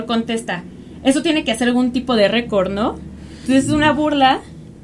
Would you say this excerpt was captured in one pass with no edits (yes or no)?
yes